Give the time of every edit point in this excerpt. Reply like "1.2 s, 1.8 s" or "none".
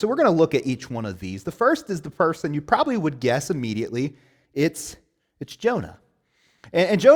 none